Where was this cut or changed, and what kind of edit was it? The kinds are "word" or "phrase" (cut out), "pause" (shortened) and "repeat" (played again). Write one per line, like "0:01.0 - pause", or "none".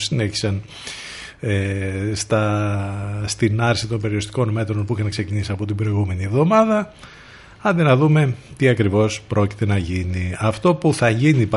none